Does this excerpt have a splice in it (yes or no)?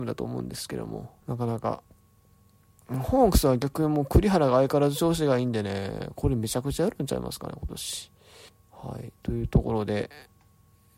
yes